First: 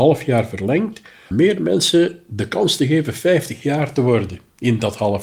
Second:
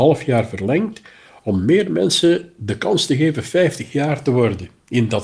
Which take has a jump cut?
first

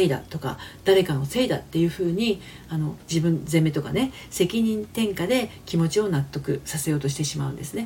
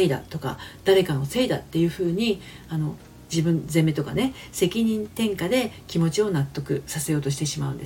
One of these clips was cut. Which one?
first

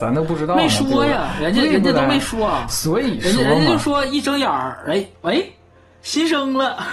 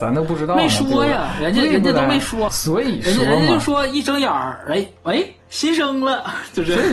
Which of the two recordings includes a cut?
second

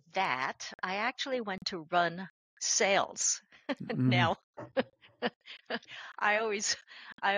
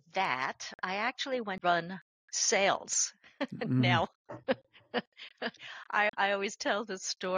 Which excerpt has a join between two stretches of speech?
second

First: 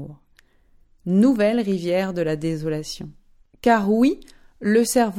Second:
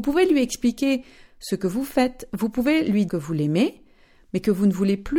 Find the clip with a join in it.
second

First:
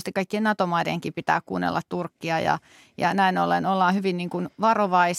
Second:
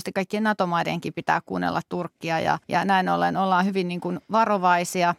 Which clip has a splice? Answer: second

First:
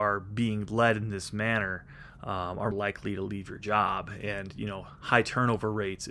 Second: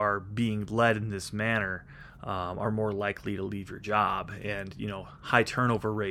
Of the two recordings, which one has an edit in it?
first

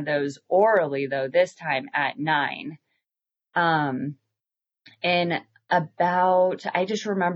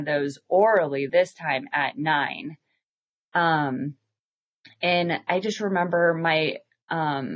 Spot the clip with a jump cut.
second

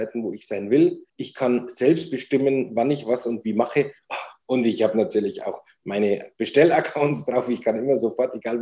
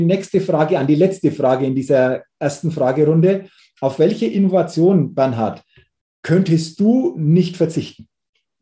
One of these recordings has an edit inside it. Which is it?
first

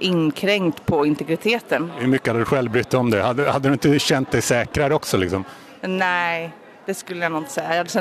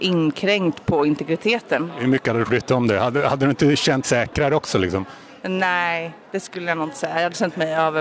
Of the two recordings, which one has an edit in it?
second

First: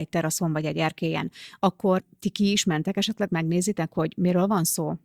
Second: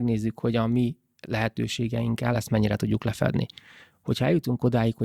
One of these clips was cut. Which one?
first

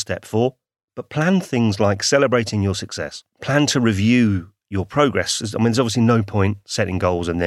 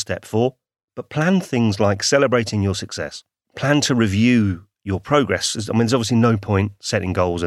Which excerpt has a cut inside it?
first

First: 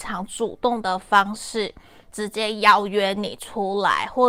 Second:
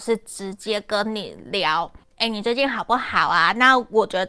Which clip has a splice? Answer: second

